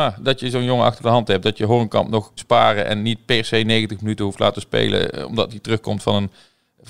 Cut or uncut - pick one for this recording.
cut